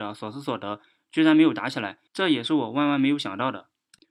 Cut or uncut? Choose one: cut